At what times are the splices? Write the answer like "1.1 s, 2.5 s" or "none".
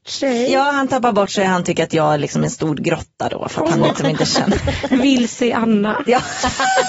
none